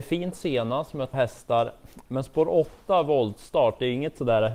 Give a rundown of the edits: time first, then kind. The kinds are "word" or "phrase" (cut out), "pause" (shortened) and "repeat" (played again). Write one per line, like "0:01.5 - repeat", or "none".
0:01.1 - word